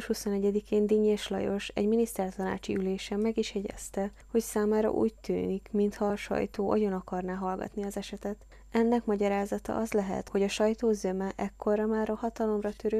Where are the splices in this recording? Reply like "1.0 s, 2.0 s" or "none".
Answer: none